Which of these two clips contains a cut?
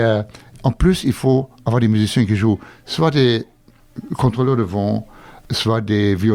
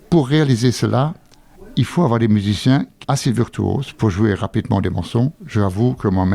second; 1 cut; at 3.0 s

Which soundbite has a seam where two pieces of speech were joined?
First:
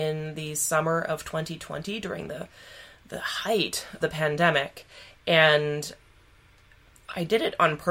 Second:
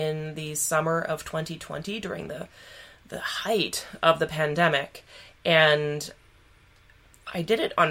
first; 1 cut; at 4.0 s

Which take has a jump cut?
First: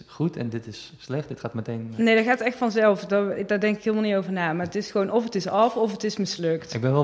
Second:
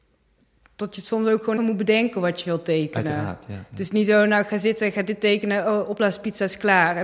second; 1 cut; at 1.6 s

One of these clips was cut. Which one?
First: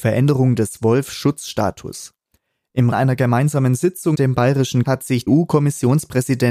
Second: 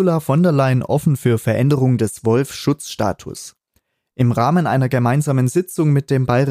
first; 4 cuts; at 2.9 s, 4.1 s, 4.8 s, 5.3 s

